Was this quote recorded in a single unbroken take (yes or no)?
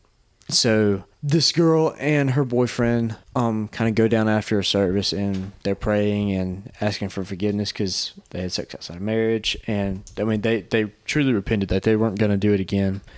no